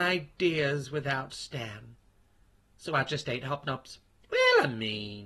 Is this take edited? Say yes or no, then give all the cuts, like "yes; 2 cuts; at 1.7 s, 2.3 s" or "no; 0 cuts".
no; 0 cuts